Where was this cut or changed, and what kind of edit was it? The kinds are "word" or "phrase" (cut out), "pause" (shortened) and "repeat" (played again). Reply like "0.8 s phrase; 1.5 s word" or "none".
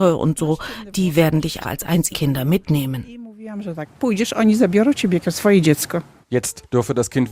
1.6 s word; 2.1 s word